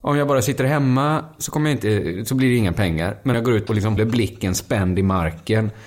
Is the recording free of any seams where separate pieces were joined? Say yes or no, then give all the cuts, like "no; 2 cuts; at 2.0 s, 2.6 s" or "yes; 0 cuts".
no; 3 cuts; at 3.3 s, 3.7 s, 4.0 s